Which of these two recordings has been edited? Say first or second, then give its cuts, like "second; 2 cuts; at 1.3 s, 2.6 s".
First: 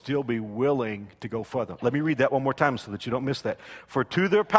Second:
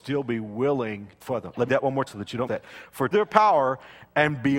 second; 5 cuts; at 1.2 s, 1.7 s, 2.1 s, 2.5 s, 3.1 s